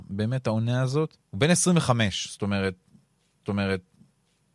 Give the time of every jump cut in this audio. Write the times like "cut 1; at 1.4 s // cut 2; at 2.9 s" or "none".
cut 1; at 1.2 s // cut 2; at 3.4 s